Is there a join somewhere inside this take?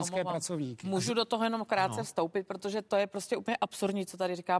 no; 0 cuts

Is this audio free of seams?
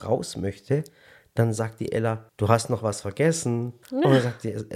no; 2 cuts; at 2.3 s, 3.8 s

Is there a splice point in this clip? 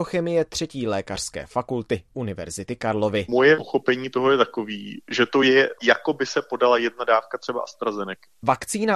no; 0 cuts

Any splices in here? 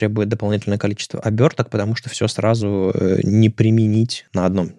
no; 0 cuts

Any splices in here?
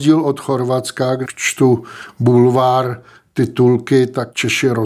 yes; 1 cut; at 1.2 s

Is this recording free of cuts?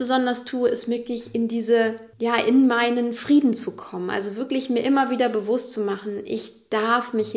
no; 1 cut; at 2.1 s

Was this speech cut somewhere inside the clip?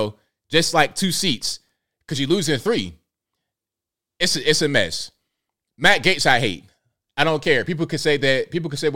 no; 0 cuts

